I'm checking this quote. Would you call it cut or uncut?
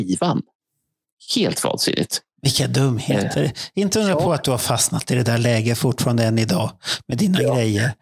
uncut